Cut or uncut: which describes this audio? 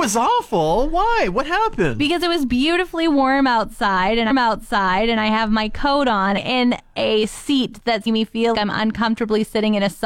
cut